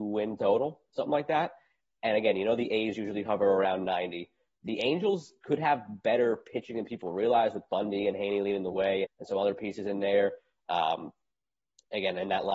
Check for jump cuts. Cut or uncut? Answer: cut